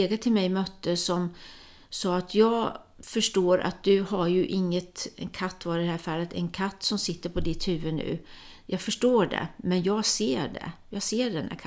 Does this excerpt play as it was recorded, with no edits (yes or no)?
yes